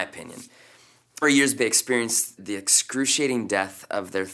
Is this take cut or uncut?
cut